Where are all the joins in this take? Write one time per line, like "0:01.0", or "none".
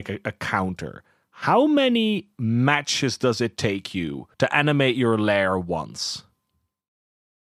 0:04.3